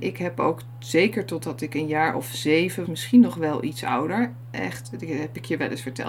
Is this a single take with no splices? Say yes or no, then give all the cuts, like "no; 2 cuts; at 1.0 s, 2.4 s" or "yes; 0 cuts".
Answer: no; 1 cut; at 2.8 s